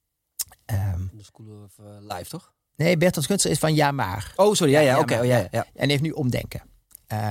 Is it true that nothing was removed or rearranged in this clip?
yes; 0 cuts

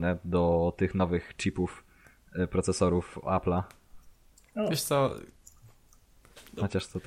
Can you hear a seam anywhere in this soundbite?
no; 0 cuts

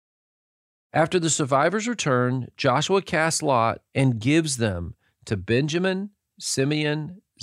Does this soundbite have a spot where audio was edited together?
yes; 1 cut; at 3.9 s

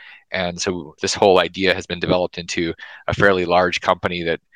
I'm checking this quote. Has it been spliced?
yes; 1 cut; at 1.0 s

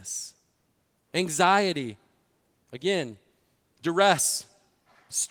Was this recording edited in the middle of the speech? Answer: no; 0 cuts

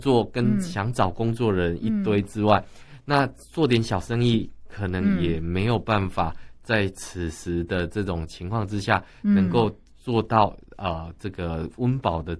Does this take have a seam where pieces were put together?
no; 0 cuts

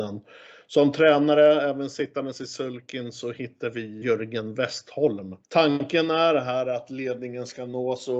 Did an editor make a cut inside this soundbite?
yes; 2 cuts; at 4.0 s, 5.4 s

